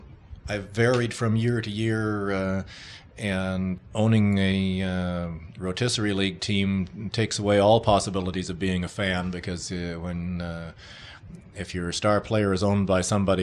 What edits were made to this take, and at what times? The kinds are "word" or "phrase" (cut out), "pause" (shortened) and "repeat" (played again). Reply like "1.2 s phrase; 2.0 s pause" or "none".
none